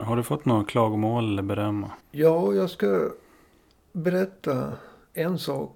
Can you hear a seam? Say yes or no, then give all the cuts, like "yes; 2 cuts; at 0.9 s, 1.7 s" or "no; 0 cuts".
no; 0 cuts